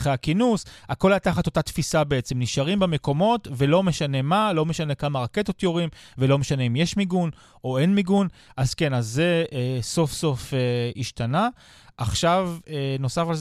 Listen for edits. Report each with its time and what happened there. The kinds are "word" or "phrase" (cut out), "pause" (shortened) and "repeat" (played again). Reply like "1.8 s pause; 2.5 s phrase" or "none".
none